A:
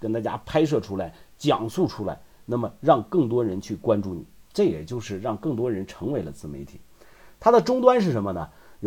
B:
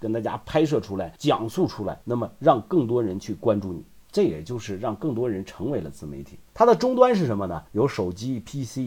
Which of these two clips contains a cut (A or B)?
B